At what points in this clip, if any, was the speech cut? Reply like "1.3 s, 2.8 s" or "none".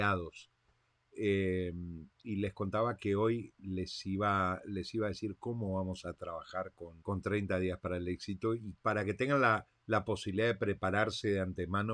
7.0 s, 8.8 s, 9.8 s